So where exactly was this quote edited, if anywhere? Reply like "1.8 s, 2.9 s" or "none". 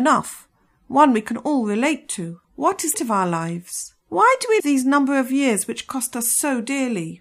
2.4 s, 2.9 s, 4.0 s, 4.6 s